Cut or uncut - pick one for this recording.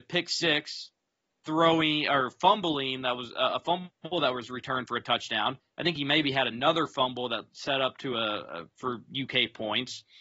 uncut